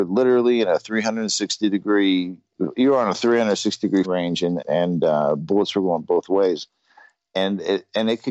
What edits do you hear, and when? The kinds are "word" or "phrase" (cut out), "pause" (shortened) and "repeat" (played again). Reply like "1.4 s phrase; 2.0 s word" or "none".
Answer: 4.0 s word; 4.6 s word